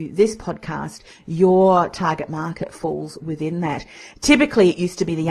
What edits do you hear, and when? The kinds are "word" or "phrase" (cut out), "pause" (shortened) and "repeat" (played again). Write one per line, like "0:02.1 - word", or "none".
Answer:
none